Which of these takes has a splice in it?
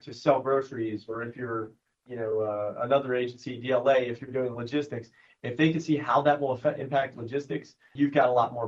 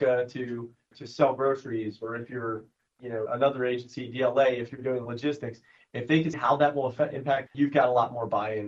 second; 3 cuts; at 3.2 s, 6.3 s, 7.5 s

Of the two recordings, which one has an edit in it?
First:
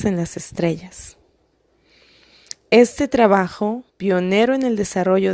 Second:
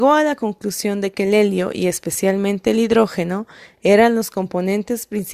first; 1 cut; at 3.9 s

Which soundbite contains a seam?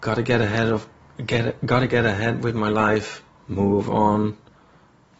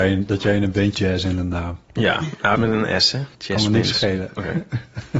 second; 4 cuts; at 0.9 s, 1.8 s, 2.6 s, 3.3 s

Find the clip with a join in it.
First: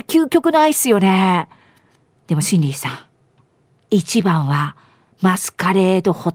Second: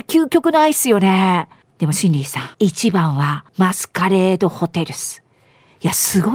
second; 3 cuts; at 1.6 s, 2.5 s, 3.5 s

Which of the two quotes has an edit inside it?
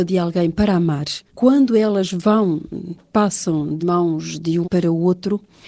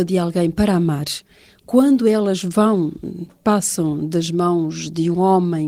first; 3 cuts; at 1.3 s, 3.8 s, 4.6 s

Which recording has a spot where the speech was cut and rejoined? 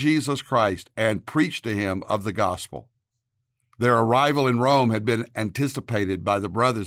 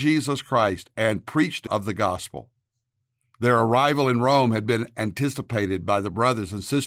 second; 1 cut; at 1.7 s

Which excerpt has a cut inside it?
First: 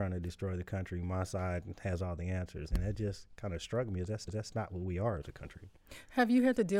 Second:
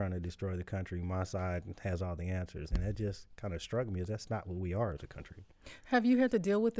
first; 1 cut; at 4.3 s

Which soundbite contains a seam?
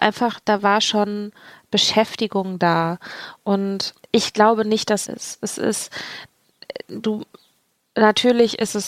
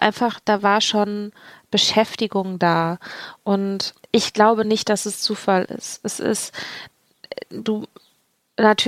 first; 1 cut; at 5.0 s

